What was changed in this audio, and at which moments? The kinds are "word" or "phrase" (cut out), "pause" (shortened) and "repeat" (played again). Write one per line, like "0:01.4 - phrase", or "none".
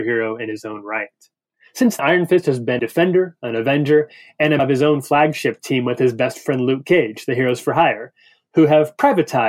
0:02.0 - word
0:02.8 - word
0:04.6 - word